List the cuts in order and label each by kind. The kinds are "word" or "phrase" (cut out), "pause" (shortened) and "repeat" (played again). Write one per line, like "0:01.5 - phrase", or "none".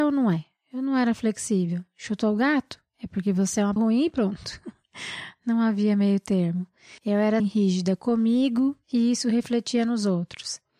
0:03.8 - word
0:07.0 - pause
0:07.4 - word